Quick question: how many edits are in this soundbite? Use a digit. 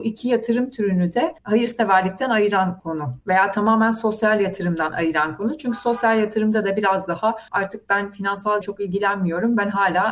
1